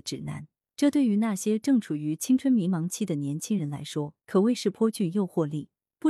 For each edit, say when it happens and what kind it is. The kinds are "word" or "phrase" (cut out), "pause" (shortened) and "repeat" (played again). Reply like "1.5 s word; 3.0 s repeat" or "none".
4.2 s pause